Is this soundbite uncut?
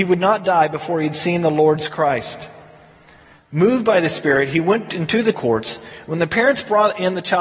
no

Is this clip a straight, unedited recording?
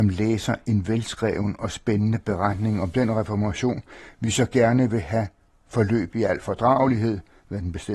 yes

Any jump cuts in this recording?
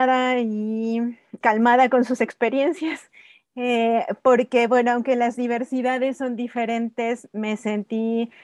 yes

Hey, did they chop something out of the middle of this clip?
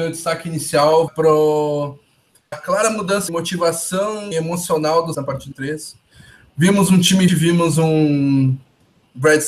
yes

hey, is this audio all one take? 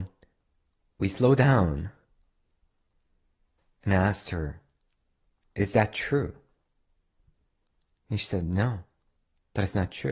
yes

